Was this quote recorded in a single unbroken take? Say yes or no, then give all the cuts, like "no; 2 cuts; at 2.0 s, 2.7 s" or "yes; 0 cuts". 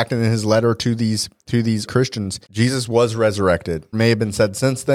no; 4 cuts; at 1.4 s, 1.9 s, 2.4 s, 3.9 s